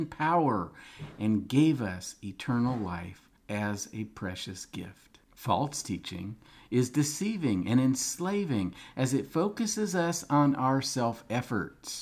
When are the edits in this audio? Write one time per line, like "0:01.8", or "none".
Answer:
0:03.4
0:05.2